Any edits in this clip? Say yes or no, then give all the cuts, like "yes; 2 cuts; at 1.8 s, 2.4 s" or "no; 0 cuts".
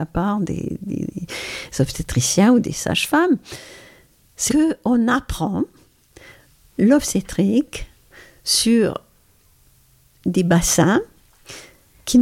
yes; 1 cut; at 4.5 s